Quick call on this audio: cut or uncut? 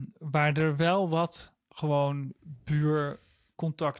uncut